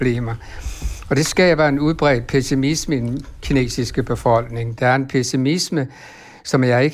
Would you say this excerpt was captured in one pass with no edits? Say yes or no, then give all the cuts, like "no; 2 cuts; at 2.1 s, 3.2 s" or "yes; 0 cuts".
yes; 0 cuts